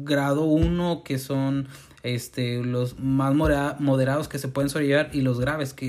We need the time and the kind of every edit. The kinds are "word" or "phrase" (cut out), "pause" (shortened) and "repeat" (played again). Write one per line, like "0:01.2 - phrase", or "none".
none

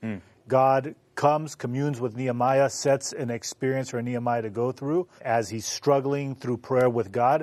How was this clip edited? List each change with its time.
0:05.2 - word

